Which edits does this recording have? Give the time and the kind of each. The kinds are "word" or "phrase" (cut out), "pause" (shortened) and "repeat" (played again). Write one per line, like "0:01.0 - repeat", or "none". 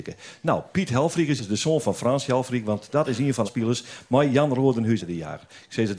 0:01.4 - word
0:03.4 - word
0:05.0 - phrase